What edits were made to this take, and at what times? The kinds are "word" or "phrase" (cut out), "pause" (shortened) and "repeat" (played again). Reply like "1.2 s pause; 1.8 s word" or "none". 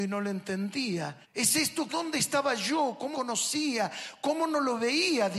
1.2 s pause; 1.9 s phrase; 3.1 s word